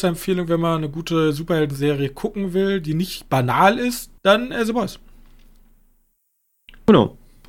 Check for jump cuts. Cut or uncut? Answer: cut